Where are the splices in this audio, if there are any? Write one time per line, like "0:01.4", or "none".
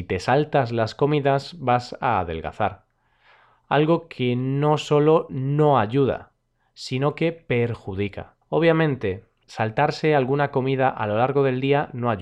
0:08.4